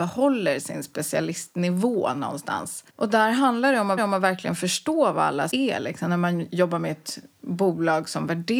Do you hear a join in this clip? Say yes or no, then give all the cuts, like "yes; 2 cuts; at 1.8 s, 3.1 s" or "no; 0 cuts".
yes; 3 cuts; at 2.9 s, 4.0 s, 5.5 s